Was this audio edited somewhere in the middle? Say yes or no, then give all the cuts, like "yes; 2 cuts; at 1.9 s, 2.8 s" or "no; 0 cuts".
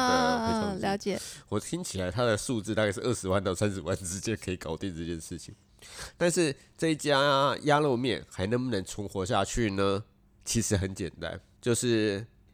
yes; 2 cuts; at 10.3 s, 11.6 s